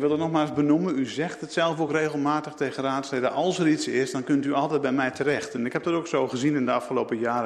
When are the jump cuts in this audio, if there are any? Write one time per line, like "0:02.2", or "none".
none